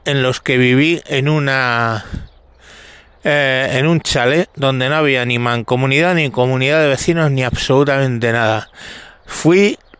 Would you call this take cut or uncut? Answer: uncut